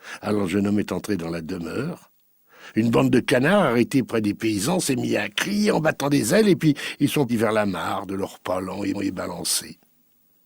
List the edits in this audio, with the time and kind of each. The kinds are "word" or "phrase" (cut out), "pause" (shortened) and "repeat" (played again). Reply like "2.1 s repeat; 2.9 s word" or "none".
7.3 s word; 8.9 s repeat